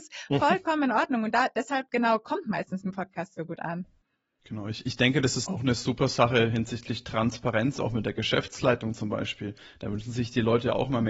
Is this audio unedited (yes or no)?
yes